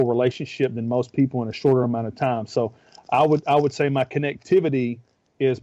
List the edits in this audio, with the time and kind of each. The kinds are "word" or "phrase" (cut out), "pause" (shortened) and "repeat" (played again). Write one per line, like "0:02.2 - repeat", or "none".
none